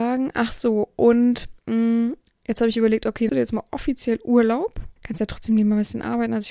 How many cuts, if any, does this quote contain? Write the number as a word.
three